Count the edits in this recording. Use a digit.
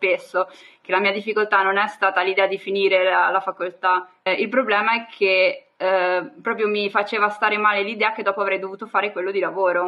1